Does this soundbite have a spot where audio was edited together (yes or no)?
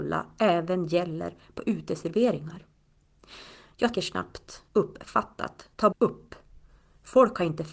yes